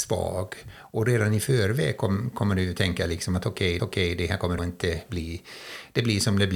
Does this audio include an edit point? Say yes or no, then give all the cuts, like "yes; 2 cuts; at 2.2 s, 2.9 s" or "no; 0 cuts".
yes; 2 cuts; at 3.8 s, 4.6 s